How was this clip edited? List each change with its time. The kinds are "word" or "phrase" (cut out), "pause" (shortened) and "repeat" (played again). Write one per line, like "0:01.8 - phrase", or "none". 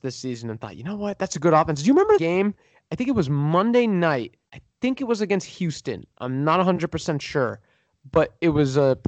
0:02.2 - word
0:04.5 - pause